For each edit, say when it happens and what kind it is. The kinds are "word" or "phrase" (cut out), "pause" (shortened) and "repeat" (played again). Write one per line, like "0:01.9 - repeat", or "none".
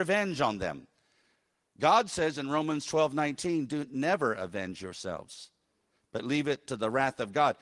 none